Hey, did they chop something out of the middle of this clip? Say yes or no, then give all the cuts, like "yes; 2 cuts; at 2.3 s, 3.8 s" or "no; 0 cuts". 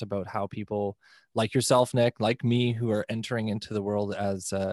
no; 0 cuts